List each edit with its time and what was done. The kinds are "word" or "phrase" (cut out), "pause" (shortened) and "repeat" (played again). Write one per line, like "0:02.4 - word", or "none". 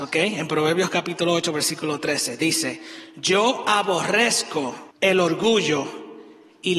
0:04.9 - pause